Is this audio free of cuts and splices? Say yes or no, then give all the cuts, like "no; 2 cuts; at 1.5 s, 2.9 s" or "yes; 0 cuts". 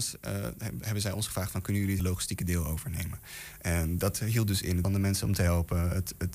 no; 2 cuts; at 2.0 s, 4.8 s